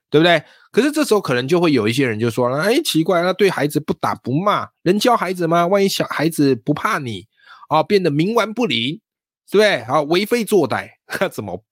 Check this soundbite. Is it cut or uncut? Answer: uncut